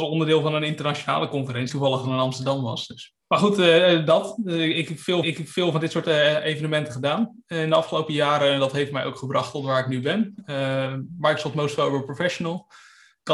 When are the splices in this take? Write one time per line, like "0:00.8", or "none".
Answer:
0:01.7
0:03.2
0:05.2